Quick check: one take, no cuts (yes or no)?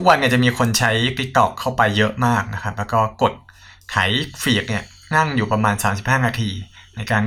yes